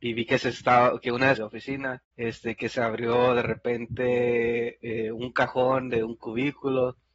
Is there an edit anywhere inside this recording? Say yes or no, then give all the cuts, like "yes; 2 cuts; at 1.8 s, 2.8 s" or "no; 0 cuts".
yes; 3 cuts; at 1.0 s, 1.4 s, 2.0 s